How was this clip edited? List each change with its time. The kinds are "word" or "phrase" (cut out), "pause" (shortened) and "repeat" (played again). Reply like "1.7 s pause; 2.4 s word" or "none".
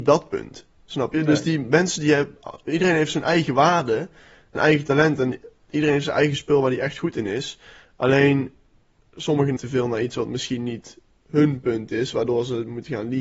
4.6 s word; 9.6 s word